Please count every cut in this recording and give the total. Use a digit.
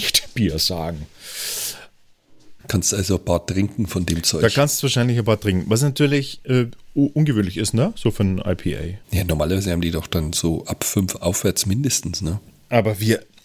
2